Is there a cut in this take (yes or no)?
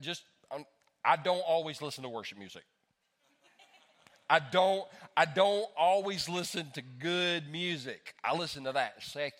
no